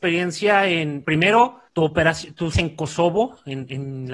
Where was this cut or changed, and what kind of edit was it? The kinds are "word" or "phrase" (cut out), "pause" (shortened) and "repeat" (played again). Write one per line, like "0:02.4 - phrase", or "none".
0:01.0 - word
0:01.7 - pause
0:02.5 - word